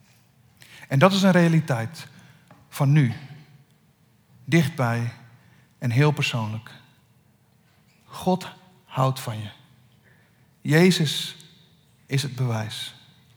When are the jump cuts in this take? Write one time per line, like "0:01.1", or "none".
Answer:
none